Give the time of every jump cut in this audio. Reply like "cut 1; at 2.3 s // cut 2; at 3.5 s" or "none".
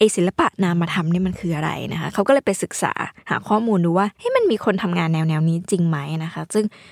cut 1; at 4.1 s